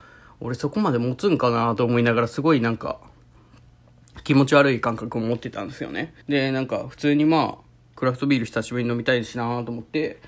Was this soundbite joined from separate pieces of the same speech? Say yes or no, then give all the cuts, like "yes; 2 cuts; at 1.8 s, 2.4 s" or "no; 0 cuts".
yes; 1 cut; at 6.2 s